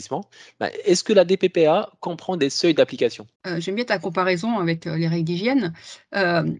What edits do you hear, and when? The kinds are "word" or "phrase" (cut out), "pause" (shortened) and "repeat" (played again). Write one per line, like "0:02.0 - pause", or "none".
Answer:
0:03.4 - pause